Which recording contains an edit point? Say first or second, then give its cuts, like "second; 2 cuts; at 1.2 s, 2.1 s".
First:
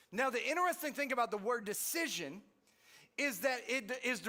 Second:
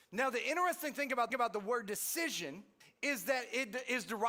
second; 2 cuts; at 1.3 s, 2.8 s